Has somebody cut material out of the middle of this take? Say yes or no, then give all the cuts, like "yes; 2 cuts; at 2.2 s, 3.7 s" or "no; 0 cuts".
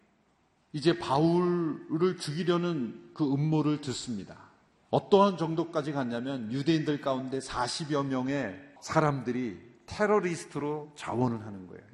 yes; 2 cuts; at 4.7 s, 8.8 s